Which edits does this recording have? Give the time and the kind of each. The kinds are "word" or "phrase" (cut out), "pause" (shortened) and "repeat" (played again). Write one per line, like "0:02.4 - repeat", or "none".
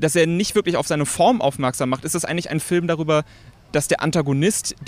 none